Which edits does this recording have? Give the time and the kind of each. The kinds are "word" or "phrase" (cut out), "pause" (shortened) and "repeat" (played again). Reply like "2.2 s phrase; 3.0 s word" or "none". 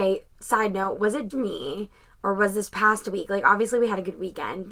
1.3 s word